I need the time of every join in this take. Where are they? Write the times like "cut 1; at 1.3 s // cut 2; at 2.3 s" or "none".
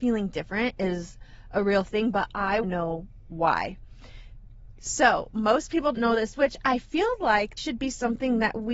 cut 1; at 2.6 s // cut 2; at 5.9 s // cut 3; at 7.6 s